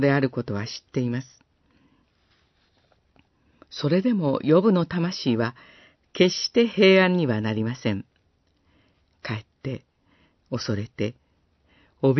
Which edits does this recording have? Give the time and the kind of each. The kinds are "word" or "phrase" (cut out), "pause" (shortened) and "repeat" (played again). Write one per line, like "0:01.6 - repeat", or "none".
none